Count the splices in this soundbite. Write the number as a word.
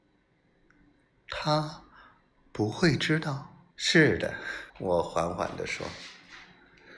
two